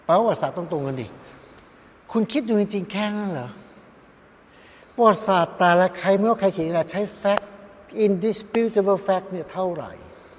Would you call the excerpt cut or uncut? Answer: uncut